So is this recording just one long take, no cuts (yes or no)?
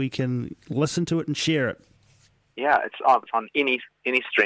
no